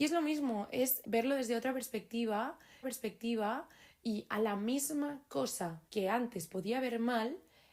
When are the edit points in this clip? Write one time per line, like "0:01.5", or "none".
0:01.0
0:02.8
0:05.9